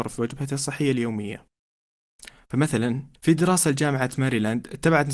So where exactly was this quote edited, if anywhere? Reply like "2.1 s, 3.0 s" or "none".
3.2 s